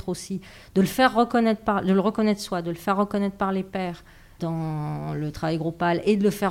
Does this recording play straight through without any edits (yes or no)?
yes